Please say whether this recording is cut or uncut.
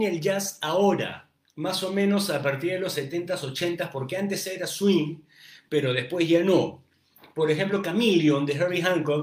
uncut